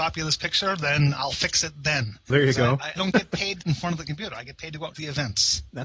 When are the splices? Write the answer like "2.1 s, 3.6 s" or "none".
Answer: 2.3 s, 3.0 s, 3.6 s, 4.9 s

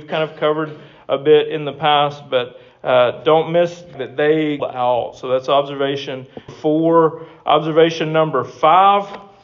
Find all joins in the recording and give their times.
3.9 s, 4.6 s, 6.5 s

